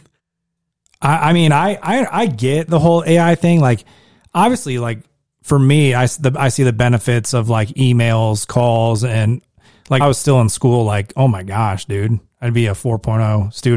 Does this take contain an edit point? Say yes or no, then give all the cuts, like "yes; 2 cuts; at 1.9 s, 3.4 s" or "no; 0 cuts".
yes; 1 cut; at 10.0 s